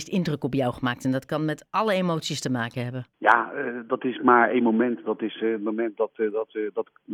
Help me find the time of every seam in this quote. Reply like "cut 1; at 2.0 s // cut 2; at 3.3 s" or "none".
cut 1; at 3.1 s